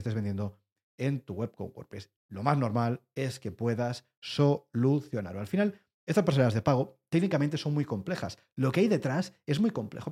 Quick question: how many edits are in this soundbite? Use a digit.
1